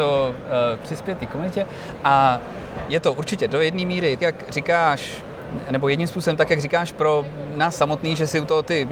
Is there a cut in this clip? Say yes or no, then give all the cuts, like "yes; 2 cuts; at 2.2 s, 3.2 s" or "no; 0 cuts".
yes; 1 cut; at 4.2 s